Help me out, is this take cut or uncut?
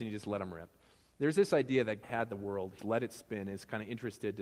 cut